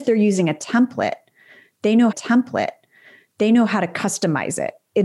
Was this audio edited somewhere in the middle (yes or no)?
yes